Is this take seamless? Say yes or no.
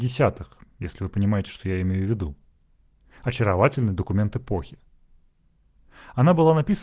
yes